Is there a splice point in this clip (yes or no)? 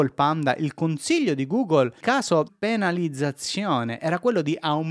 yes